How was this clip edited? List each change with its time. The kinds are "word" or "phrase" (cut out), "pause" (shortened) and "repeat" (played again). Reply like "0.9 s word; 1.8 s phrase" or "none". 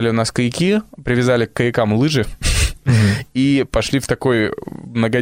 none